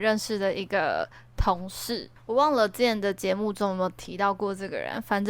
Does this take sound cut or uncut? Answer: cut